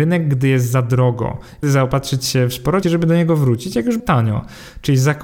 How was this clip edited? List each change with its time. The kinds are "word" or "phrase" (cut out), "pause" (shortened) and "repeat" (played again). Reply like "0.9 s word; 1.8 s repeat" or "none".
1.6 s word; 2.8 s word; 4.0 s word